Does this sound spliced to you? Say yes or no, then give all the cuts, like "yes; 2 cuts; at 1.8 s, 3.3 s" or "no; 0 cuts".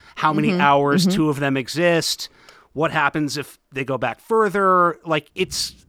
no; 0 cuts